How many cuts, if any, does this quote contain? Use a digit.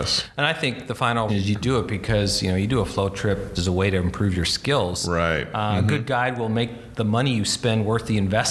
2